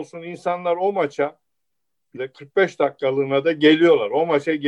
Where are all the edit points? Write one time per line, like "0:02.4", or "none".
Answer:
0:02.2